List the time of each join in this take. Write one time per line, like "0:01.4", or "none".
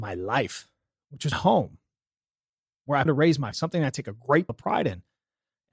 0:01.3
0:03.1
0:03.5
0:04.5